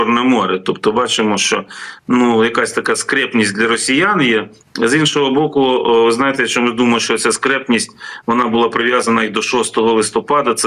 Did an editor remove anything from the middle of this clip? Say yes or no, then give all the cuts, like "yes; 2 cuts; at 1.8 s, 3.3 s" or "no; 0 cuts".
no; 0 cuts